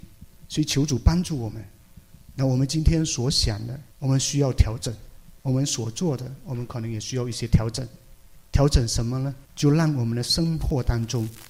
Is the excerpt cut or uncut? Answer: cut